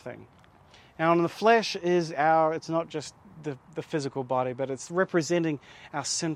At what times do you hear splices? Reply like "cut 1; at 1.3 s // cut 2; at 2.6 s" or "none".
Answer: none